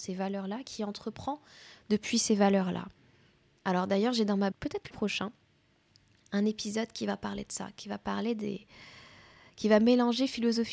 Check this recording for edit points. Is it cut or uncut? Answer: cut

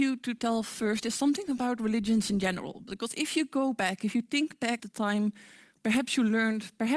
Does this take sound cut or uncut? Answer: cut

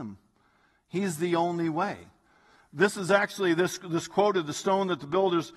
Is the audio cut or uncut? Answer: uncut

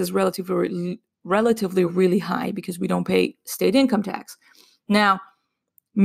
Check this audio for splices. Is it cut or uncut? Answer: uncut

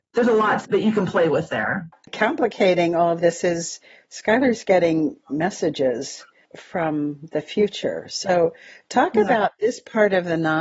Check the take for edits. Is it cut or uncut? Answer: uncut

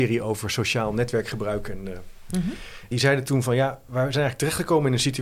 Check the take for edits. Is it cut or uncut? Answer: cut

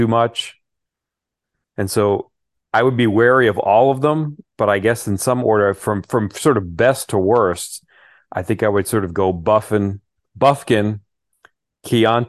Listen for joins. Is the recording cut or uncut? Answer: uncut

